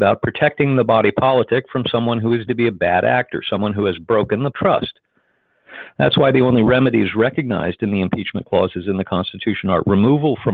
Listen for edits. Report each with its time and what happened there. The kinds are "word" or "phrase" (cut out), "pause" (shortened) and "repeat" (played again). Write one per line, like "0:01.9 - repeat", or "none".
0:02.5 - word
0:04.5 - word